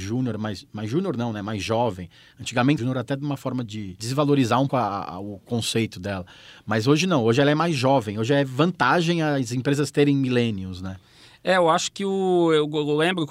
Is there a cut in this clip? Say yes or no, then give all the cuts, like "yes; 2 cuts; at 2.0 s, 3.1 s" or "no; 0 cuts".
yes; 3 cuts; at 2.8 s, 3.6 s, 4.7 s